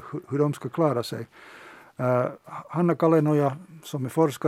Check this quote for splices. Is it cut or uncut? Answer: uncut